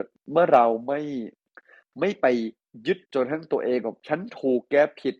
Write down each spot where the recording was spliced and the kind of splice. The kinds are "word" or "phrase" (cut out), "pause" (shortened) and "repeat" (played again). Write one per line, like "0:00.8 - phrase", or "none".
0:01.5 - pause
0:03.0 - pause